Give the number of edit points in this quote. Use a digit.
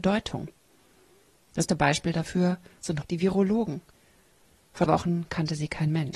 3